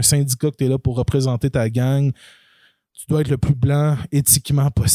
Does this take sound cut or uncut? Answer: uncut